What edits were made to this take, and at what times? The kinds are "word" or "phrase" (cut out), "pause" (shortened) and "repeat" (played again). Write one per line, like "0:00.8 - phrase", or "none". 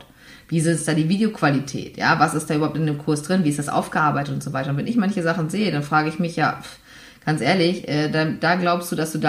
none